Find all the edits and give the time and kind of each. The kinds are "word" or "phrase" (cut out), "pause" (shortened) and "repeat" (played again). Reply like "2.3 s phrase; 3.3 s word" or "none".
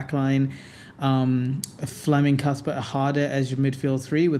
none